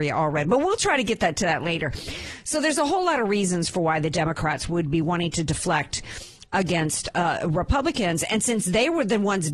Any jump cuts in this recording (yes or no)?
no